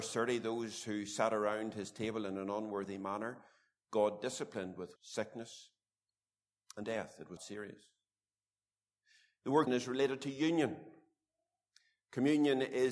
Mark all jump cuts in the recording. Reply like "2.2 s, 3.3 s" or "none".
5.0 s, 6.8 s, 7.4 s, 9.7 s